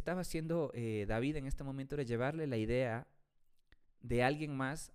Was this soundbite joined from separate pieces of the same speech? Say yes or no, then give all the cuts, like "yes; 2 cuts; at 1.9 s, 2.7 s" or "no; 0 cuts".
yes; 1 cut; at 3.8 s